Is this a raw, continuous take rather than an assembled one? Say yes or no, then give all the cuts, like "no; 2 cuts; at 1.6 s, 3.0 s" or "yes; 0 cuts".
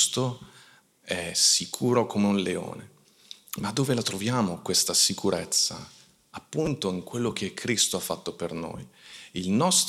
yes; 0 cuts